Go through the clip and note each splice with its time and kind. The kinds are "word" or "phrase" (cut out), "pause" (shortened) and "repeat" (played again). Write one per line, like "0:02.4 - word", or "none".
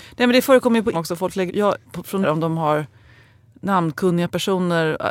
0:00.9 - word
0:01.5 - word
0:01.8 - word
0:02.2 - word